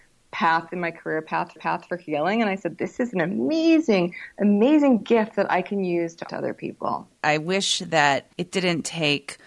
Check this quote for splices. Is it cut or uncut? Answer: cut